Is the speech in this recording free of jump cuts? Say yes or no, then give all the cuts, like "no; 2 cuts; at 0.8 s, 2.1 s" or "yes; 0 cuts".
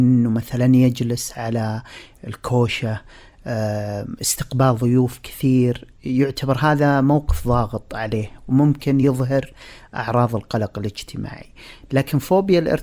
yes; 0 cuts